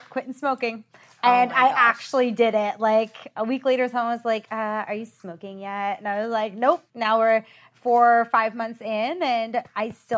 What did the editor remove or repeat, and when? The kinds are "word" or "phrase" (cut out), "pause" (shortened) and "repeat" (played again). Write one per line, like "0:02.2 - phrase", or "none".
0:06.9 - pause